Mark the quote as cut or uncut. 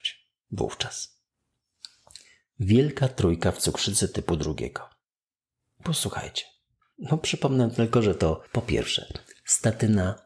cut